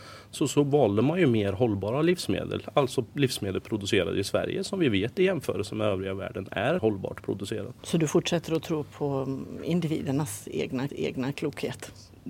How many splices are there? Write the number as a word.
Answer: three